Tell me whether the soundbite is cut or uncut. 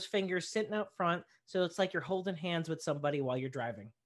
uncut